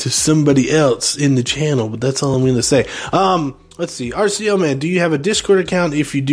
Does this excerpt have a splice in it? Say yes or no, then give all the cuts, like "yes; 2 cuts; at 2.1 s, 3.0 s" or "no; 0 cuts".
no; 0 cuts